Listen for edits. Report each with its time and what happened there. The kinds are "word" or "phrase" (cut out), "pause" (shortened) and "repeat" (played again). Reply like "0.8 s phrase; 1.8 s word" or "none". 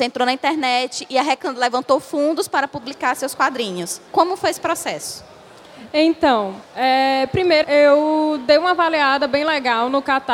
4.1 s pause; 6.6 s pause; 7.6 s word